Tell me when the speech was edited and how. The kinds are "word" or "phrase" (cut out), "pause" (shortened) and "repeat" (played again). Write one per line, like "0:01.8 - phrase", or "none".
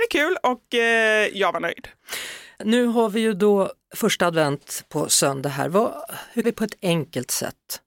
0:06.4 - word